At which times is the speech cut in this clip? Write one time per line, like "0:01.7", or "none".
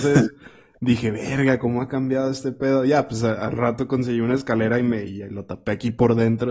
none